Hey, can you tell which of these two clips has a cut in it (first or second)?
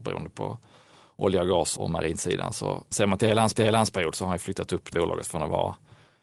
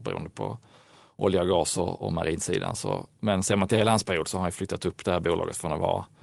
first